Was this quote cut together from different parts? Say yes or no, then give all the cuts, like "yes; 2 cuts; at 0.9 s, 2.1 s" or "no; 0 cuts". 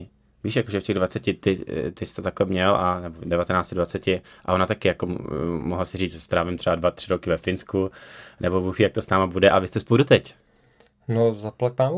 no; 0 cuts